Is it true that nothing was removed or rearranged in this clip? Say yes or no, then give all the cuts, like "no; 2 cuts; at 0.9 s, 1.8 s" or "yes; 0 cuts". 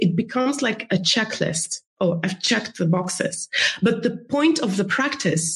no; 1 cut; at 1.9 s